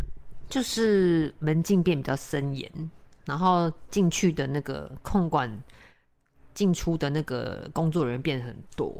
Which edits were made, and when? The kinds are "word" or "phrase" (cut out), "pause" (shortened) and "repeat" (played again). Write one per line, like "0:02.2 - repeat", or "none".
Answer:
none